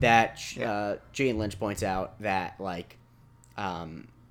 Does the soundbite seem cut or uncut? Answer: uncut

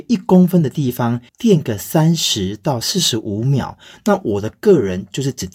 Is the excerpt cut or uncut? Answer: cut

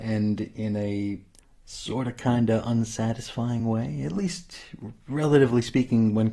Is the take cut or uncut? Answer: uncut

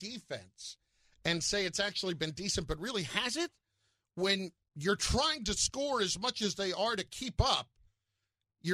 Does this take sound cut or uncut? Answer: uncut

